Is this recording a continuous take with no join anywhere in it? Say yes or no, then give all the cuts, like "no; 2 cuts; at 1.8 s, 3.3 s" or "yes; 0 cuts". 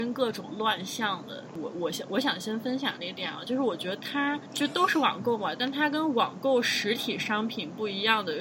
no; 2 cuts; at 1.5 s, 4.5 s